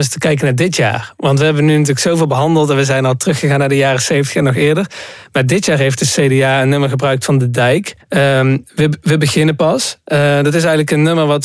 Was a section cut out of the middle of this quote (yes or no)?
yes